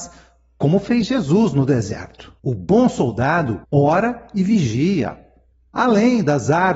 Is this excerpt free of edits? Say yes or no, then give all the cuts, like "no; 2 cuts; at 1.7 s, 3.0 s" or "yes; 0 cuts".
no; 3 cuts; at 2.4 s, 3.6 s, 5.5 s